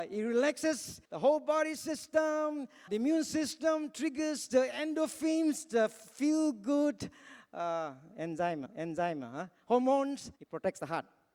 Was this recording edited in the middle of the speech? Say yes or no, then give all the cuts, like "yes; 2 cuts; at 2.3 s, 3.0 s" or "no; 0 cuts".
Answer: yes; 4 cuts; at 1.0 s, 2.9 s, 8.7 s, 10.4 s